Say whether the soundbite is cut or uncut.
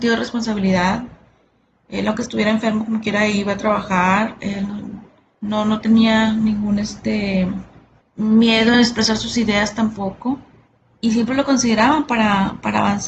uncut